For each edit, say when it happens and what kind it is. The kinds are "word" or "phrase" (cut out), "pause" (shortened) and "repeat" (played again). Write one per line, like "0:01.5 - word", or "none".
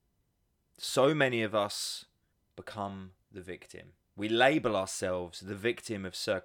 0:02.3 - pause
0:04.0 - pause